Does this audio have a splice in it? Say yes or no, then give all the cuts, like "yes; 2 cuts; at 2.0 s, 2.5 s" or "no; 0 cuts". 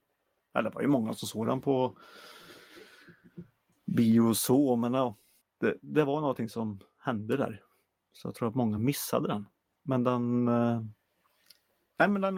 no; 0 cuts